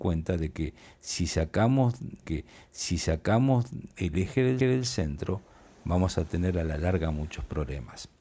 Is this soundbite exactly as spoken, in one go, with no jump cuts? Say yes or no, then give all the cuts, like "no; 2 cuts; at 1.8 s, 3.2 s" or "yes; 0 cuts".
no; 2 cuts; at 2.2 s, 4.6 s